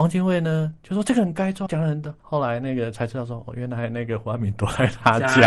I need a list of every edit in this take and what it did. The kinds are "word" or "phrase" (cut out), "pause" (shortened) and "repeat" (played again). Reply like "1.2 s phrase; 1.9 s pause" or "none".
1.7 s word; 2.2 s pause